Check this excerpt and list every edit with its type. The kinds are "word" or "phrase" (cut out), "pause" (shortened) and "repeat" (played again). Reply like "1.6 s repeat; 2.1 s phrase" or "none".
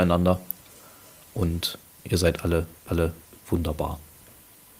2.9 s repeat